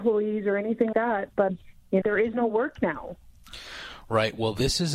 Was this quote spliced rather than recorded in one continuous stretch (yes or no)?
yes